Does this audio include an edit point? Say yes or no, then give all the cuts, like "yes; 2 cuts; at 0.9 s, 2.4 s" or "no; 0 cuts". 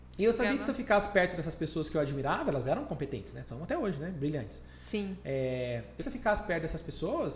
yes; 1 cut; at 6.0 s